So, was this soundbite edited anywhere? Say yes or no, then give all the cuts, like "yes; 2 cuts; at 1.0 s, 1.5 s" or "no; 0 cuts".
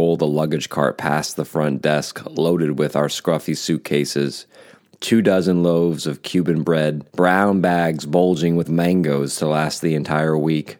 yes; 2 cuts; at 7.1 s, 8.6 s